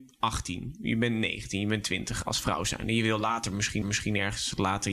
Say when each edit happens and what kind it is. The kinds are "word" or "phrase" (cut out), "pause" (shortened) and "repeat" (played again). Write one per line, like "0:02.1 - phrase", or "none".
0:03.8 - repeat